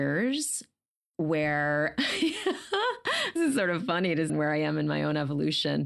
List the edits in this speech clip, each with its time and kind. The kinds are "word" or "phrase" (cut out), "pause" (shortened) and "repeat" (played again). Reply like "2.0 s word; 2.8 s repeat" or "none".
3.4 s word; 4.3 s phrase

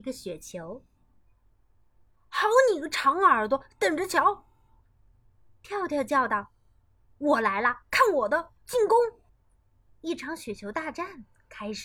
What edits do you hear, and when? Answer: 8.6 s pause; 9.3 s pause

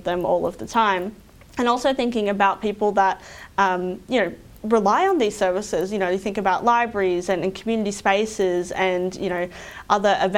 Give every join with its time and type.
none

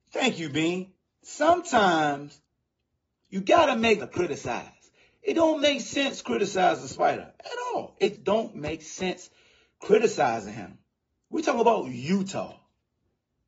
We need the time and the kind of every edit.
4.0 s phrase; 8.2 s word

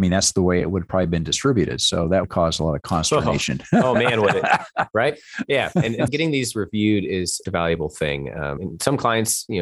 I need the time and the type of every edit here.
2.2 s word; 6.1 s word; 7.5 s word; 8.6 s word

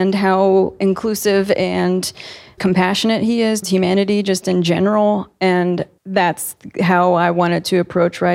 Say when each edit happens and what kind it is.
2.6 s word; 3.6 s word; 6.0 s pause

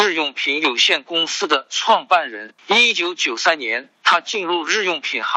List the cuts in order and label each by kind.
2.6 s pause; 4.0 s pause

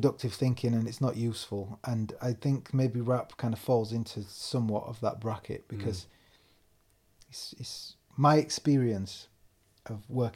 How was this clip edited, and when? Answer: none

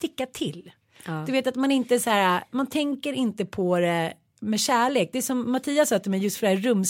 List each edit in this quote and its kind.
none

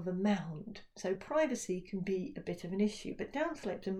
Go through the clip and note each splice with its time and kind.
none

